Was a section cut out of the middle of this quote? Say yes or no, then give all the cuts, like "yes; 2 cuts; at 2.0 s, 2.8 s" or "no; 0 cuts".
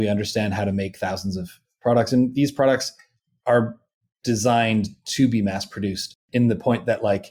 no; 0 cuts